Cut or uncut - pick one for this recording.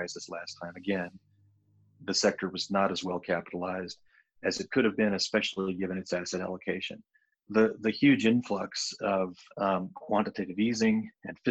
uncut